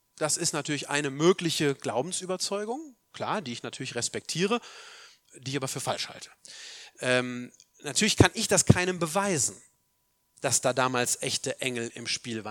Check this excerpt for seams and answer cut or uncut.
uncut